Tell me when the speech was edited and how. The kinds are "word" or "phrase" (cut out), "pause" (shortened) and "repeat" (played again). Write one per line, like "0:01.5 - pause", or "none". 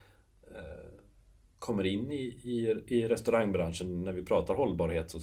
none